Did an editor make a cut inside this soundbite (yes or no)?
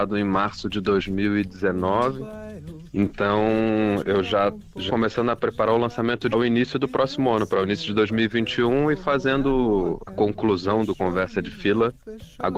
yes